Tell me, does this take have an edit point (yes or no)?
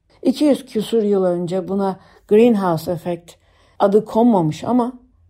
no